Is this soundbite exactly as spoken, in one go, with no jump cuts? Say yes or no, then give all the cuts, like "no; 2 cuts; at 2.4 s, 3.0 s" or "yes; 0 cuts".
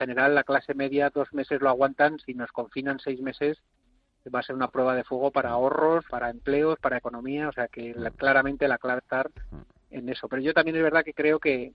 no; 3 cuts; at 6.1 s, 7.7 s, 9.0 s